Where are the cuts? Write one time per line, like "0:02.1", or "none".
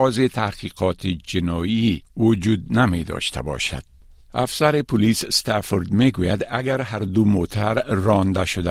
none